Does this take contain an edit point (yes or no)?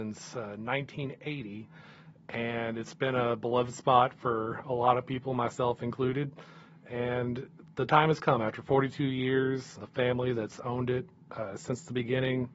yes